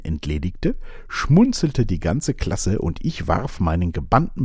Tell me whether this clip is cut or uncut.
uncut